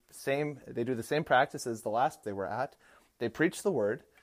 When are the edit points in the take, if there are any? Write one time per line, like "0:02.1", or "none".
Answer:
0:02.2